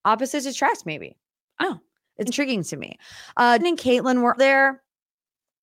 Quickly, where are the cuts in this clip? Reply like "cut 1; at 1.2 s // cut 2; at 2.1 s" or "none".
cut 1; at 1.6 s // cut 2; at 2.3 s // cut 3; at 3.6 s // cut 4; at 4.4 s